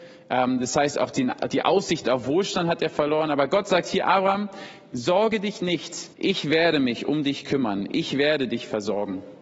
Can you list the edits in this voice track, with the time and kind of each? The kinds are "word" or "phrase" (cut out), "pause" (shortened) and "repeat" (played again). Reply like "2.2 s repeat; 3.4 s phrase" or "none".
6.1 s pause